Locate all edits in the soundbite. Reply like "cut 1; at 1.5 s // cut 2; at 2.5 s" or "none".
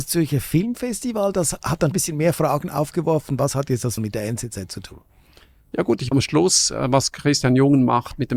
cut 1; at 1.9 s // cut 2; at 4.0 s // cut 3; at 6.1 s